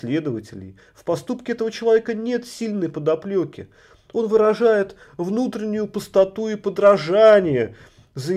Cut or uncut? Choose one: uncut